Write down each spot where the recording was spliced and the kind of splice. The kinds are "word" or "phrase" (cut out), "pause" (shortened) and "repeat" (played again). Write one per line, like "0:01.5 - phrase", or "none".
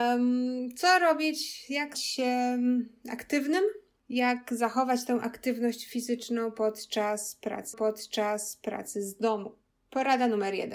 0:01.9 - word
0:07.7 - repeat